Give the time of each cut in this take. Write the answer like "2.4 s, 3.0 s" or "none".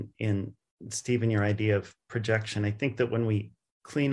none

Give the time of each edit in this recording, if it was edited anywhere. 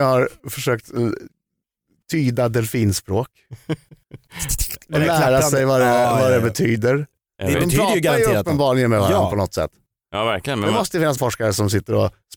11.2 s

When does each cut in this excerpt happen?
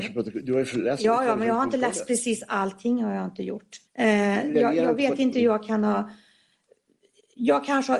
3.9 s

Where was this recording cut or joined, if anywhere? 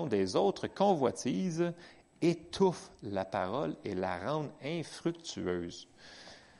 none

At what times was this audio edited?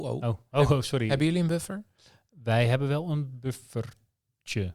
none

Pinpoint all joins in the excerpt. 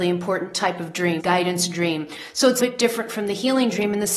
1.2 s, 2.6 s

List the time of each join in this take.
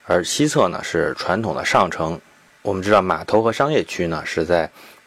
none

